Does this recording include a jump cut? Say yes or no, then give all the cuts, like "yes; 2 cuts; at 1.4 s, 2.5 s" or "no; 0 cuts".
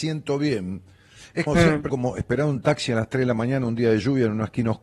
yes; 2 cuts; at 1.5 s, 1.9 s